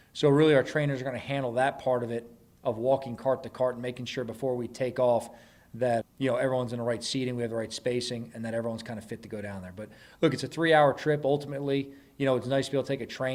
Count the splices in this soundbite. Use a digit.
1